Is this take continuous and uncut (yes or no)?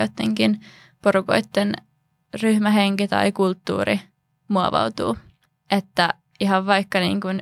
yes